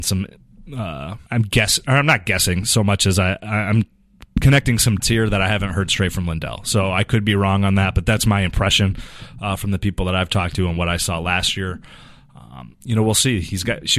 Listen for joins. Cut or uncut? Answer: cut